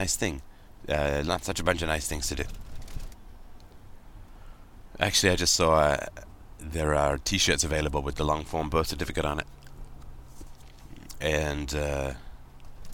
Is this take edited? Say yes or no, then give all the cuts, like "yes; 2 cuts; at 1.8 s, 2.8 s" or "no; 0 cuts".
no; 0 cuts